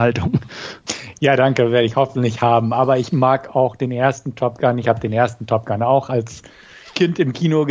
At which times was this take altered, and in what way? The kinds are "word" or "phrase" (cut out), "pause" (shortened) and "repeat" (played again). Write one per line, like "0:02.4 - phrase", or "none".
none